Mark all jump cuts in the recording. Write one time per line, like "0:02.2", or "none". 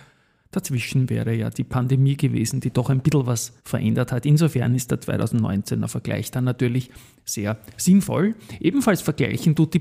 0:03.6